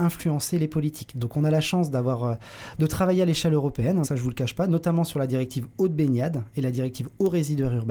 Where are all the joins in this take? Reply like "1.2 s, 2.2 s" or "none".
4.0 s